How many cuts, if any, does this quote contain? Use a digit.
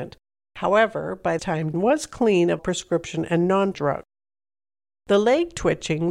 4